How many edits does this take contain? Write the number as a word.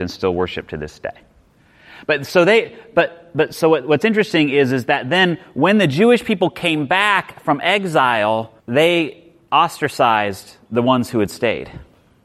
one